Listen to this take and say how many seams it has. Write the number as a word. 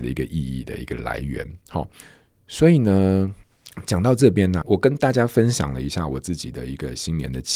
one